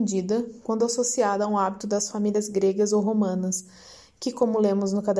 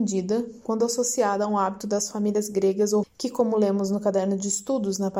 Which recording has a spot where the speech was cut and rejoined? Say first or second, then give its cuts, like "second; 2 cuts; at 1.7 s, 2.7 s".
second; 1 cut; at 3.0 s